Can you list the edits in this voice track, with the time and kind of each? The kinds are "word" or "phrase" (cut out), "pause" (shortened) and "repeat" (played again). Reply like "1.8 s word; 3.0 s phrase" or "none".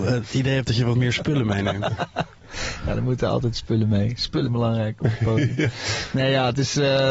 4.5 s word